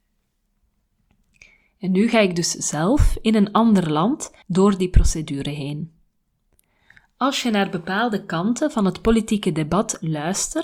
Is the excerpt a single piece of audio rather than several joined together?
no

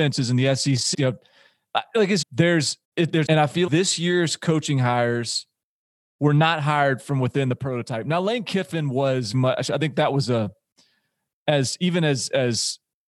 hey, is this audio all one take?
no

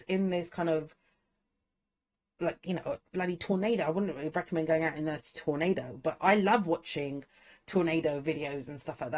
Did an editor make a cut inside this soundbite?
no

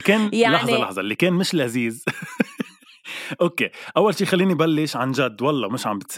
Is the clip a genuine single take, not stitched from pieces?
yes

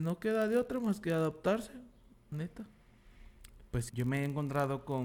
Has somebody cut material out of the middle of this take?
yes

